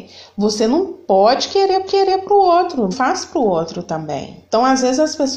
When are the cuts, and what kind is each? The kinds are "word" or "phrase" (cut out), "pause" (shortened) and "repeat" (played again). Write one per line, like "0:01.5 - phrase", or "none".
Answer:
0:01.0 - pause
0:01.9 - repeat
0:02.9 - phrase
0:04.5 - pause